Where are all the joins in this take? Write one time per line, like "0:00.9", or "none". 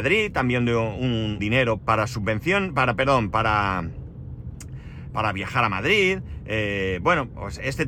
0:01.4
0:01.8
0:05.1